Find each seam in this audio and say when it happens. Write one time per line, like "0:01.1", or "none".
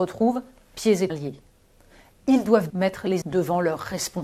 0:01.1
0:02.7
0:03.2

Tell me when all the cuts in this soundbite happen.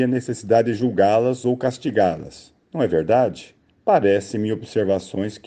0:03.6

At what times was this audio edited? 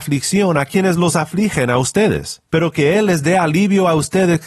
none

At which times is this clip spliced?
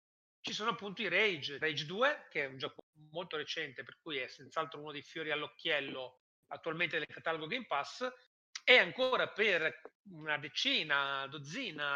0:01.6

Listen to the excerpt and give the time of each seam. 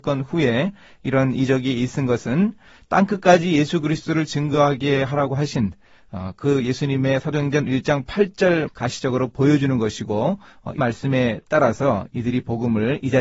0:08.7
0:10.8

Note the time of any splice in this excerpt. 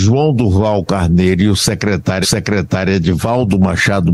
0:02.2

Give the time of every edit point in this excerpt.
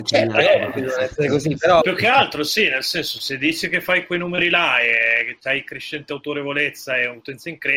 0:01.8

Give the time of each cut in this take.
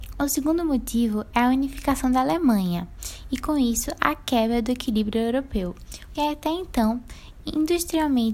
0:06.1

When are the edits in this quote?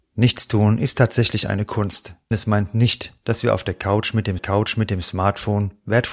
0:02.3
0:04.4

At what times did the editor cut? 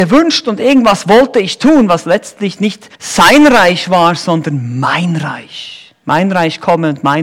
0:02.9
0:06.0

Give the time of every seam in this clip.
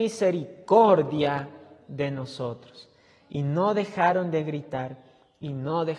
none

